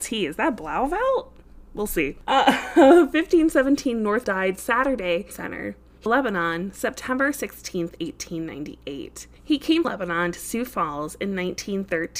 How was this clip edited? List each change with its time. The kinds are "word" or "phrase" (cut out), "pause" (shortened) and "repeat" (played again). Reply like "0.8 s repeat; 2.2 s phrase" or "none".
4.2 s word; 5.3 s phrase; 6.1 s phrase; 9.8 s word